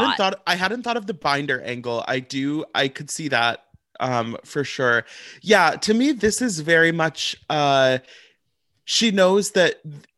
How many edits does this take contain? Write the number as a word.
zero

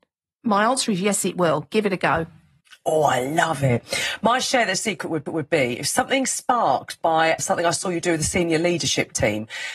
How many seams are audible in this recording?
three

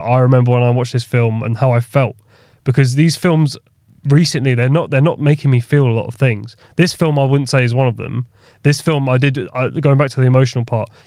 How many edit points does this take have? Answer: one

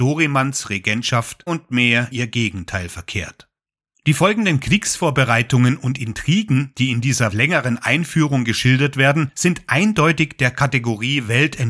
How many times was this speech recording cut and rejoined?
three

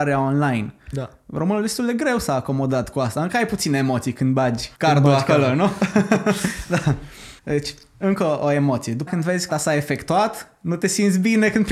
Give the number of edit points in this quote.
four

